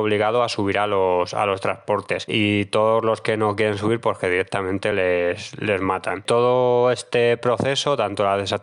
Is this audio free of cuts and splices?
yes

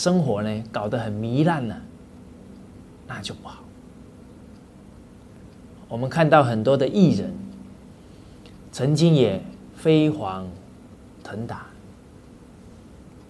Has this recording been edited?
yes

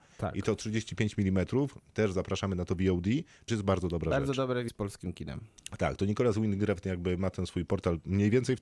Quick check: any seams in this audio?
yes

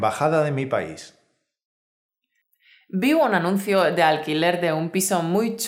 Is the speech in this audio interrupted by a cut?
no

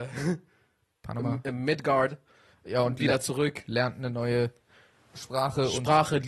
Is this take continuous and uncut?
yes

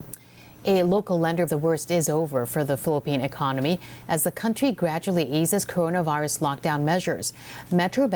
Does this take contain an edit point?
yes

